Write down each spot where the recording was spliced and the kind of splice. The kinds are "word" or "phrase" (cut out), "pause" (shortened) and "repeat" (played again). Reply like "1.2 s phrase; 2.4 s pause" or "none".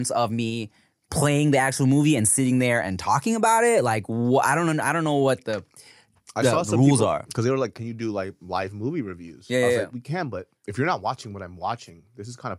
10.6 s pause